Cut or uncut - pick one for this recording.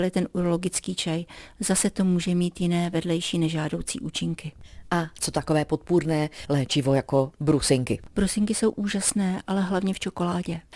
uncut